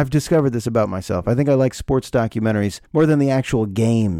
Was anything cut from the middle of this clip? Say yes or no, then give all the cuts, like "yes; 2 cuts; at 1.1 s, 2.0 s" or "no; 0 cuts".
yes; 1 cut; at 2.9 s